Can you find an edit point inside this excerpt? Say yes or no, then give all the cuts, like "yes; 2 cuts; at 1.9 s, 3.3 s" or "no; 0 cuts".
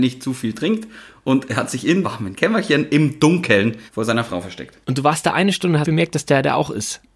yes; 4 cuts; at 2.0 s, 3.9 s, 4.8 s, 5.8 s